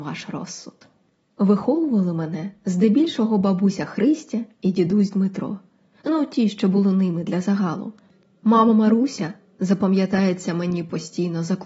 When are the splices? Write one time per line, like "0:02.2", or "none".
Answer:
none